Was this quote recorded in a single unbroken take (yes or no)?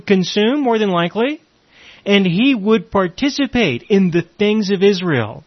yes